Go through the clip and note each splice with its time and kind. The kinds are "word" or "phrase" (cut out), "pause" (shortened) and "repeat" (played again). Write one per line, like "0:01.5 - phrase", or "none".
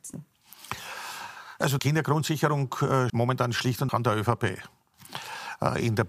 0:01.8 - word
0:03.1 - word
0:03.9 - word